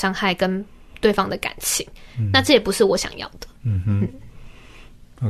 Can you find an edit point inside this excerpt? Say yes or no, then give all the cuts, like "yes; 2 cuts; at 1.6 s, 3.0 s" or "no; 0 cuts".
yes; 1 cut; at 3.6 s